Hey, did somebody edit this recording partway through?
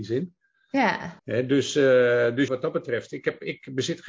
yes; 2 cuts; at 1.2 s, 2.5 s

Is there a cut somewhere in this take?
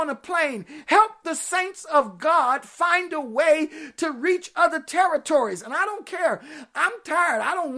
no; 0 cuts

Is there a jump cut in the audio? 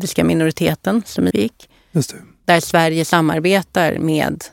yes; 1 cut; at 1.3 s

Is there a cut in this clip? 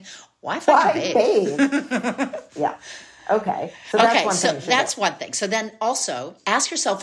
no; 0 cuts

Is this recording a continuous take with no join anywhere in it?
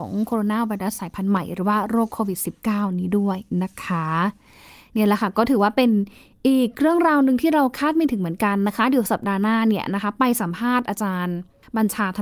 yes; 0 cuts

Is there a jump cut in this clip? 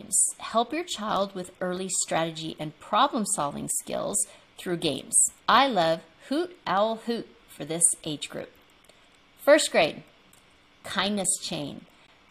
yes; 1 cut; at 5.4 s

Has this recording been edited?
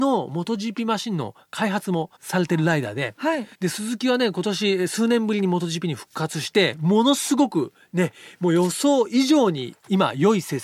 yes; 2 cuts; at 2.2 s, 3.5 s

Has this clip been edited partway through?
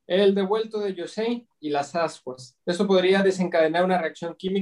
yes; 1 cut; at 2.6 s

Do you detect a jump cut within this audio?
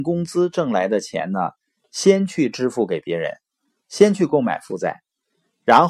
no; 0 cuts

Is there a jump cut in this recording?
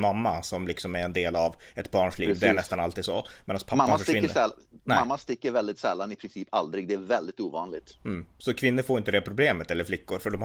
no; 0 cuts

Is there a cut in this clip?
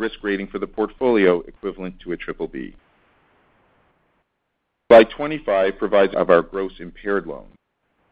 yes; 1 cut; at 6.1 s

